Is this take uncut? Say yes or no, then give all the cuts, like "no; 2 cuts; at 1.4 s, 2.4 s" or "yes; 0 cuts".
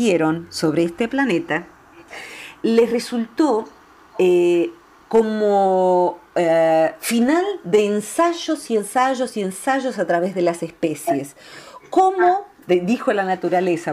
no; 1 cut; at 12.6 s